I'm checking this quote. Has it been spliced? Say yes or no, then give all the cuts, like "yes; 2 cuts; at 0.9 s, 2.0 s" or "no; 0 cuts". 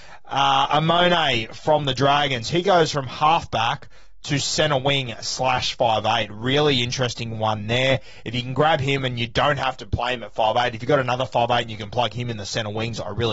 no; 0 cuts